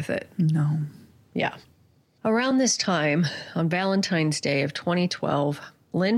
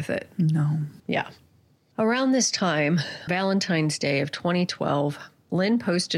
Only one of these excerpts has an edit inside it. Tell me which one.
second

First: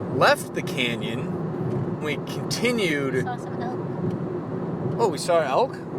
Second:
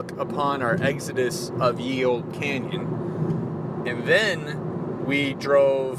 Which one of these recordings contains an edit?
first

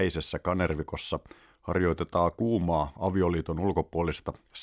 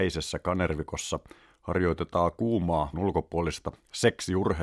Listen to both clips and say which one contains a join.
second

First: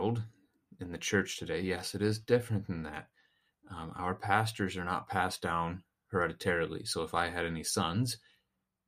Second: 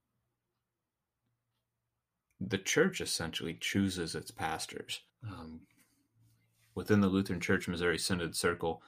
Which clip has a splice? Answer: second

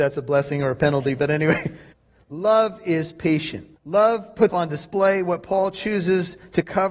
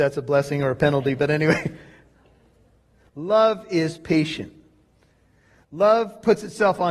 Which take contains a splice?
first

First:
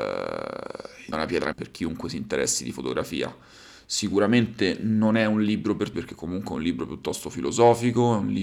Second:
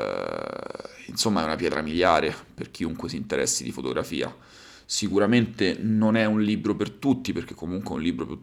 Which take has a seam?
first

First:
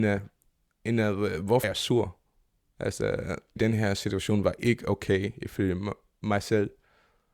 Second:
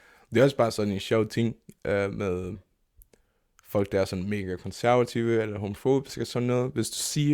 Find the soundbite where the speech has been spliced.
first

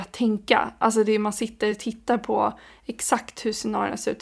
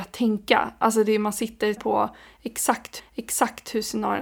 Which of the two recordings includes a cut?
second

